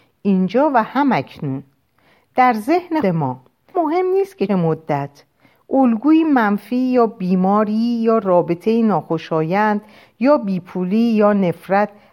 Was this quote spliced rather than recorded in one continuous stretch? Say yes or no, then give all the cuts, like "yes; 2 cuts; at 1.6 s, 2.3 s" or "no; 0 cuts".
yes; 3 cuts; at 3.0 s, 3.7 s, 4.5 s